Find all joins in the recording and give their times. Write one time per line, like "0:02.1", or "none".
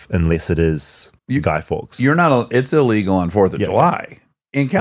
0:01.2